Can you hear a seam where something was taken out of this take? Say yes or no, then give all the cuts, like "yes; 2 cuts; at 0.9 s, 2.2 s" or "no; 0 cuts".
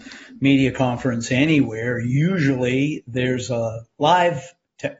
no; 0 cuts